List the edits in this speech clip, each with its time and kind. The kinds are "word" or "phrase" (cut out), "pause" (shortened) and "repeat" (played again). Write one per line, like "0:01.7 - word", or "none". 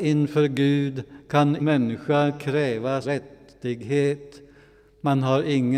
0:01.6 - word
0:03.0 - word